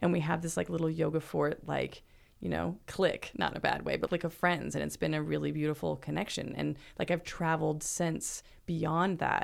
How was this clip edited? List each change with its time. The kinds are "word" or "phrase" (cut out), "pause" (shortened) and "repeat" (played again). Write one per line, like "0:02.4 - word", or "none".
0:04.1 - word